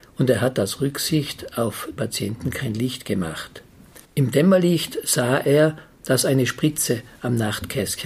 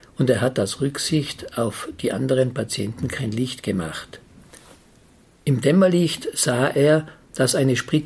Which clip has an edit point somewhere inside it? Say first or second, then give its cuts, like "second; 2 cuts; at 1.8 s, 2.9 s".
first; 2 cuts; at 2.0 s, 4.0 s